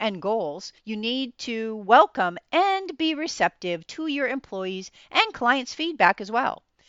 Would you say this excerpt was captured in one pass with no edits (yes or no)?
yes